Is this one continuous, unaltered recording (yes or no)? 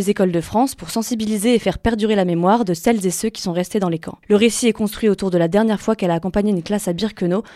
no